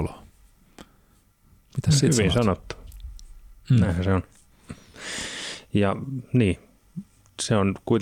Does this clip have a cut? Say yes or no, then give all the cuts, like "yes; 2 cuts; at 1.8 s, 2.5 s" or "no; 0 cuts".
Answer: no; 0 cuts